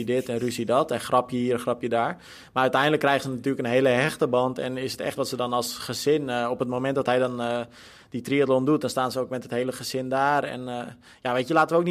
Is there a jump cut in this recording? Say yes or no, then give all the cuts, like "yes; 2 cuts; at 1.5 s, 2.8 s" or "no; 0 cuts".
yes; 1 cut; at 5.2 s